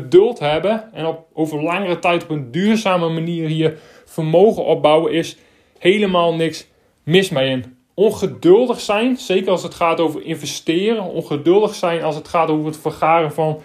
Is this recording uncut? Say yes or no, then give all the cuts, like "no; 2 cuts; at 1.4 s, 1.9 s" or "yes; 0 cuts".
yes; 0 cuts